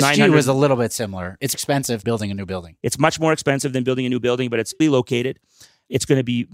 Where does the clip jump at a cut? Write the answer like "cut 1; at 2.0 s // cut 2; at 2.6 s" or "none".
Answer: cut 1; at 1.5 s // cut 2; at 2.0 s // cut 3; at 4.8 s